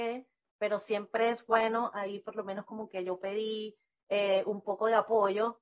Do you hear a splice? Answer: no; 0 cuts

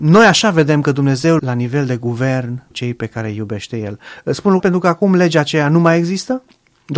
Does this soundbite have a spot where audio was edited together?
yes; 3 cuts; at 1.4 s, 2.7 s, 4.6 s

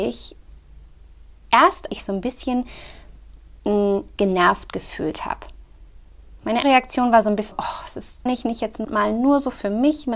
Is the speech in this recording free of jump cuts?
no; 6 cuts; at 1.9 s, 4.2 s, 6.6 s, 7.5 s, 8.3 s, 8.8 s

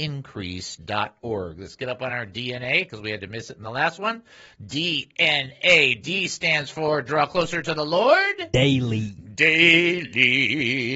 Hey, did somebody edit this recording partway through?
no; 0 cuts

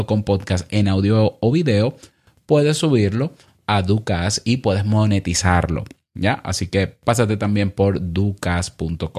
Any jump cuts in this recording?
no; 0 cuts

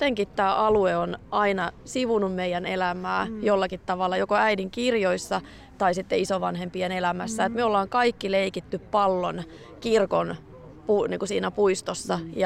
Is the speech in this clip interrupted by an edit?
no; 0 cuts

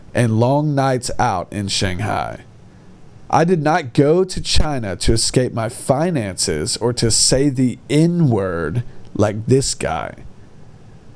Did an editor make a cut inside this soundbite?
no; 0 cuts

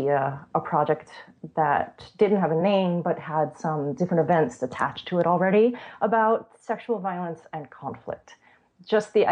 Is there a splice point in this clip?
no; 0 cuts

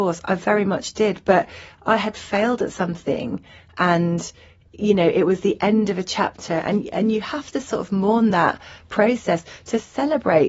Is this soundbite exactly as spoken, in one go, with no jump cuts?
yes; 0 cuts

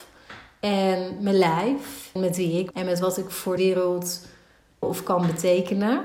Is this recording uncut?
no; 4 cuts; at 2.2 s, 2.7 s, 3.6 s, 4.8 s

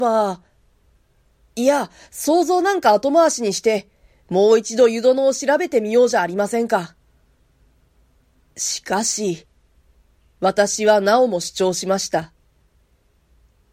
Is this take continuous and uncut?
yes; 0 cuts

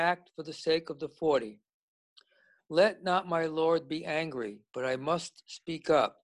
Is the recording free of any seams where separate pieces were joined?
yes; 0 cuts

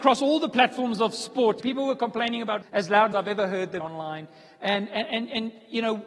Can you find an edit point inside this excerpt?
yes; 4 cuts; at 1.6 s, 2.6 s, 3.1 s, 3.8 s

